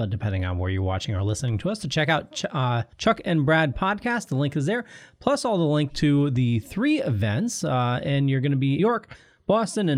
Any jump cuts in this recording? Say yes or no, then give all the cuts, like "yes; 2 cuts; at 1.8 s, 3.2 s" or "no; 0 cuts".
yes; 2 cuts; at 2.9 s, 8.8 s